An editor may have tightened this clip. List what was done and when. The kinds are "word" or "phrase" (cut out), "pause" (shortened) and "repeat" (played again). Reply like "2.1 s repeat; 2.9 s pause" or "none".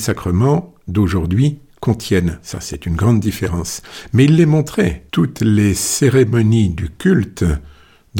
5.1 s pause